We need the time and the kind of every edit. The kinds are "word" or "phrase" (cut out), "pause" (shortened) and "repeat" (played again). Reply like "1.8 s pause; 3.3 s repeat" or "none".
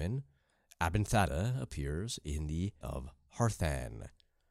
2.8 s word

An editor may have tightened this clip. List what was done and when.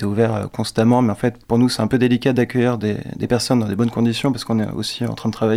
none

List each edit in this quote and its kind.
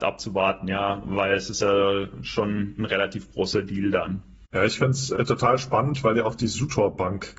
none

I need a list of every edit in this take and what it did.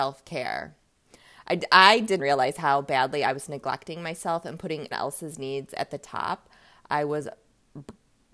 2.2 s word; 4.9 s word

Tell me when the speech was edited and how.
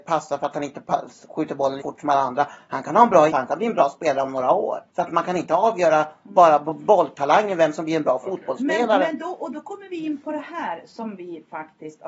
1.8 s word; 3.3 s word; 4.9 s pause

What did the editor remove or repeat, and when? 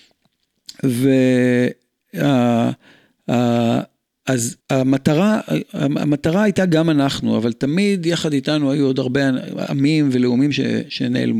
4.6 s pause

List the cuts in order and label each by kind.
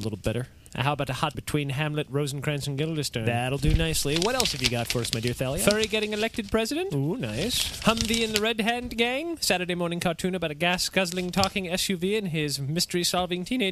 1.3 s phrase

